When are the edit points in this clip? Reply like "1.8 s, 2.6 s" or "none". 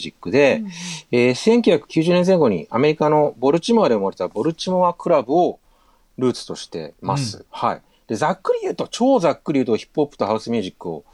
none